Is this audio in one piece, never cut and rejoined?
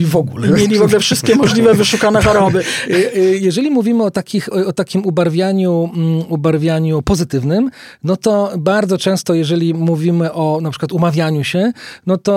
no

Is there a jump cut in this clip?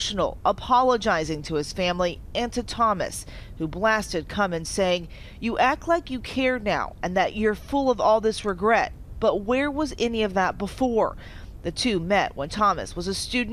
no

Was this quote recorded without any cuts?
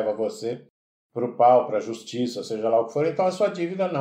yes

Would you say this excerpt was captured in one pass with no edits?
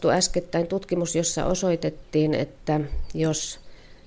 yes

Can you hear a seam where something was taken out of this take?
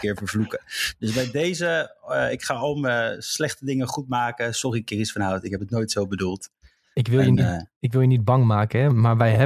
no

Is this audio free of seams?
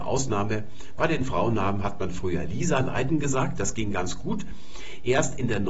yes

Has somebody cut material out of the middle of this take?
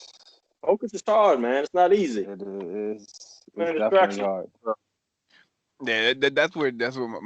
no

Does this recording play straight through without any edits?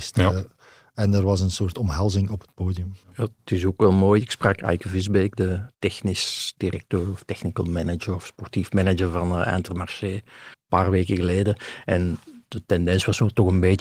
no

